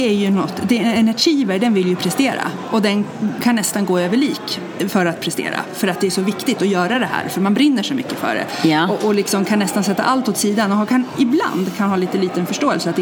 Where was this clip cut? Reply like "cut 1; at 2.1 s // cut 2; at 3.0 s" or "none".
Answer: none